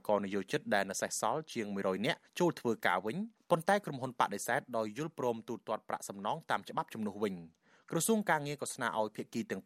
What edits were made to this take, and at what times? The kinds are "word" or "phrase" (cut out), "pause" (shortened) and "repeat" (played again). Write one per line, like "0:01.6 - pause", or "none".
0:02.3 - pause